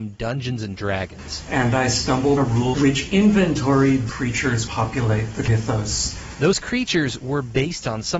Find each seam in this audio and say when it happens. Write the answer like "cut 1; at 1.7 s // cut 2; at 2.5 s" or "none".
cut 1; at 2.4 s // cut 2; at 2.7 s // cut 3; at 4.1 s // cut 4; at 4.7 s